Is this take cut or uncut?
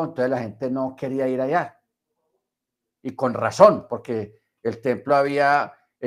uncut